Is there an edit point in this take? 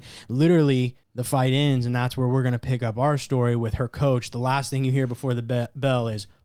yes; 1 cut; at 1.0 s

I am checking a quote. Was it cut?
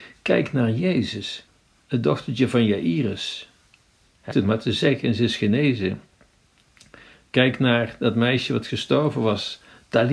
yes; 1 cut; at 4.3 s

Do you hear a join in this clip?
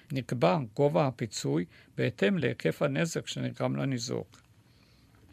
no; 0 cuts

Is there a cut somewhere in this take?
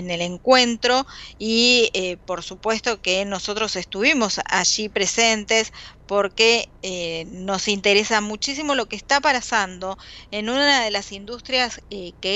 no; 0 cuts

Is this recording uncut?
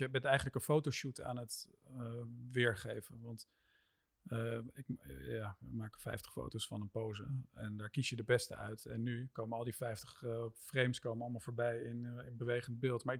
yes; 0 cuts

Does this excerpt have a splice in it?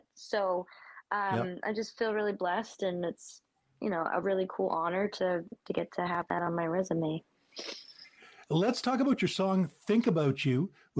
no; 0 cuts

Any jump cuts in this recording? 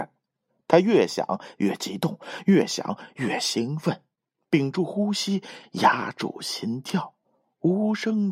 no; 0 cuts

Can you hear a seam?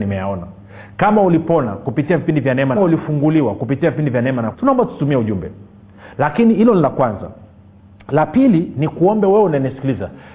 yes; 2 cuts; at 2.8 s, 4.5 s

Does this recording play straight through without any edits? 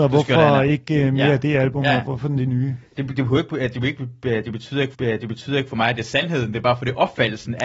no; 1 cut; at 4.9 s

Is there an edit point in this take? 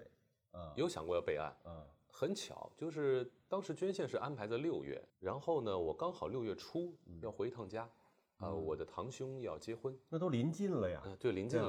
yes; 1 cut; at 5.1 s

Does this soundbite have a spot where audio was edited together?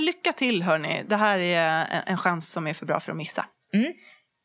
no; 0 cuts

